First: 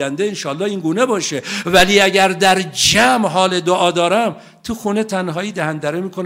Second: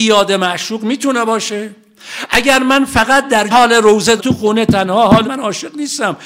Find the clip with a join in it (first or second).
second